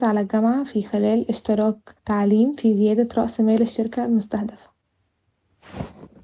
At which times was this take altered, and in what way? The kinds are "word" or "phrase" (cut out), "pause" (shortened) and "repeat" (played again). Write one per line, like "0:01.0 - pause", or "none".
0:02.0 - pause